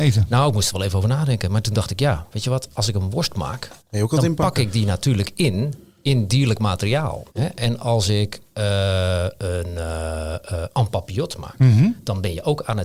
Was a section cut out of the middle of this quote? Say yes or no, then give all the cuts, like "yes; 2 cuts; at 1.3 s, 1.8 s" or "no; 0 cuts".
yes; 2 cuts; at 3.8 s, 7.3 s